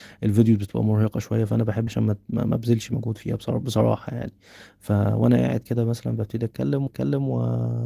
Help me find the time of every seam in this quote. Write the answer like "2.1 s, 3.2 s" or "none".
1.9 s, 6.9 s